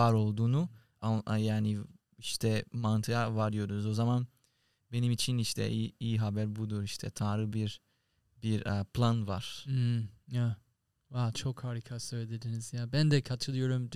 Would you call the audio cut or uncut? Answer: uncut